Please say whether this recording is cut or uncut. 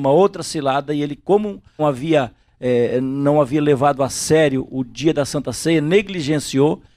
cut